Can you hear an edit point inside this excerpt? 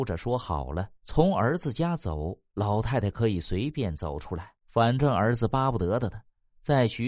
yes; 2 cuts; at 1.0 s, 4.6 s

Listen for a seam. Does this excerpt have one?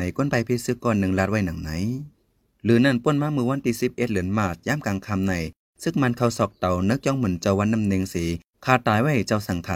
no; 0 cuts

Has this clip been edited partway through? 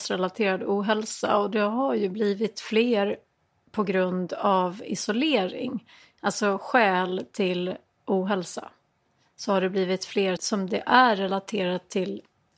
yes; 1 cut; at 10.4 s

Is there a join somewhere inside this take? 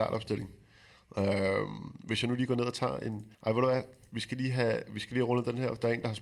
yes; 1 cut; at 3.3 s

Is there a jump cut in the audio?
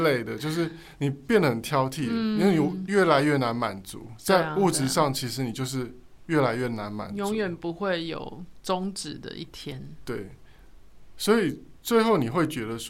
no; 0 cuts

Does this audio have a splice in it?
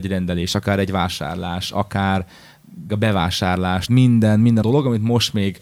yes; 3 cuts; at 2.9 s, 3.9 s, 4.6 s

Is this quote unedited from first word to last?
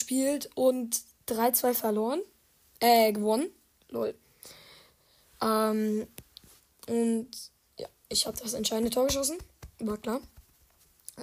yes; 0 cuts

